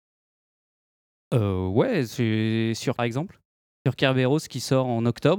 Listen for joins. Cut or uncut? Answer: cut